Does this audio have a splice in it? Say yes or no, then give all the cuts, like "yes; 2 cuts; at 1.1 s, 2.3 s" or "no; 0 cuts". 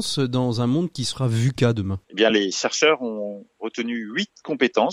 no; 0 cuts